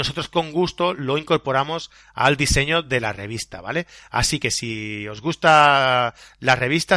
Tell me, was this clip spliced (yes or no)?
no